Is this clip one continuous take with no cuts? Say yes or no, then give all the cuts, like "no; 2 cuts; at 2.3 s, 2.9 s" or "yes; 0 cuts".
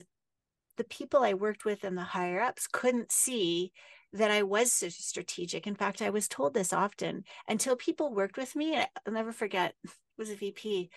yes; 0 cuts